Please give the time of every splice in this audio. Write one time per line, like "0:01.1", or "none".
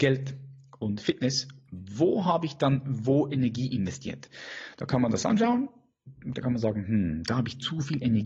none